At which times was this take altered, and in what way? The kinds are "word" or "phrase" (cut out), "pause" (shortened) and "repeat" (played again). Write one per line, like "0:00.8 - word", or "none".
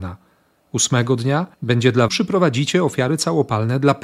0:01.5 - pause
0:02.1 - phrase